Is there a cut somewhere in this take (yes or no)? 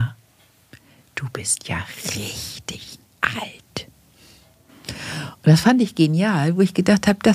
no